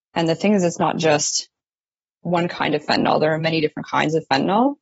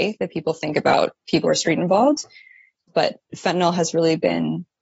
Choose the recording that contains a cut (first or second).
second